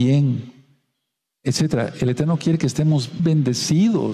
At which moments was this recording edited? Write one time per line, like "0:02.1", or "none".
0:03.2